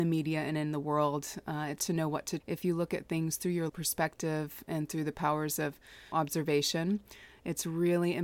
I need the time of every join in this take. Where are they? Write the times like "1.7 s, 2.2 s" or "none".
1.8 s, 2.4 s, 3.7 s, 6.1 s